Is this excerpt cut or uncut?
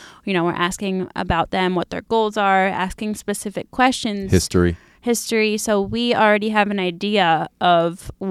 uncut